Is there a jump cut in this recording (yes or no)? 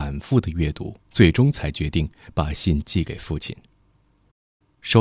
yes